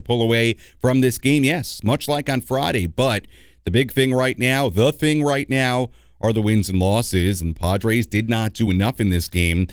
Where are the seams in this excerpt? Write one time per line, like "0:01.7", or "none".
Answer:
none